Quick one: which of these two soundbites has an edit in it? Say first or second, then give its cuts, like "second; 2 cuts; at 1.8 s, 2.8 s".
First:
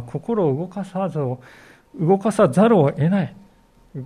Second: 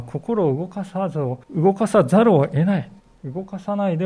second; 2 cuts; at 1.4 s, 3.0 s